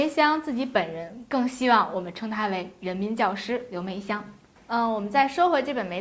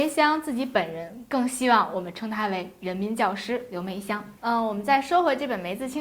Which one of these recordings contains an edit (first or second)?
second